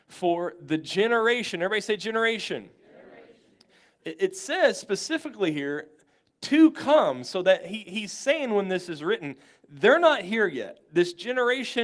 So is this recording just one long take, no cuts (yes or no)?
yes